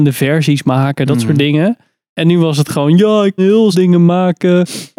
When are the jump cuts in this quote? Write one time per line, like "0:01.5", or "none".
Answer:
0:03.4
0:03.7